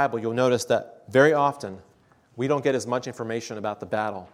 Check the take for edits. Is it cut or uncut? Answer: uncut